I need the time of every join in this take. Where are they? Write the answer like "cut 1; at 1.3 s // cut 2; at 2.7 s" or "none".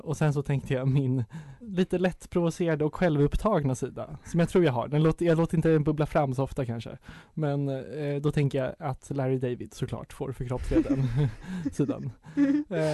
cut 1; at 1.6 s